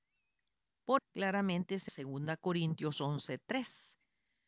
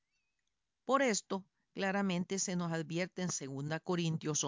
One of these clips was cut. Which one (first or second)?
first